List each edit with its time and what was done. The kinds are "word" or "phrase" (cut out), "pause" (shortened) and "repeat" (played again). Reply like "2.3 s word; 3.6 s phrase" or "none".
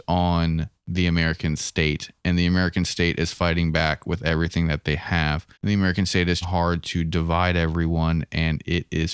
5.5 s pause; 6.4 s word